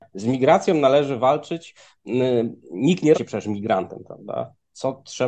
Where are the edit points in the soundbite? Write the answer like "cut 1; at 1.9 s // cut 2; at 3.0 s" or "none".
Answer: cut 1; at 3.1 s